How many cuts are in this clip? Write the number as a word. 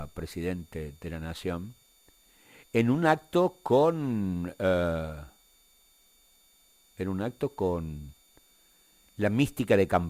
zero